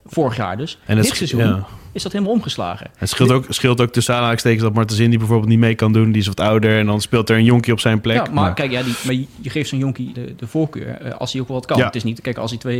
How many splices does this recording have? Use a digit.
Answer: 1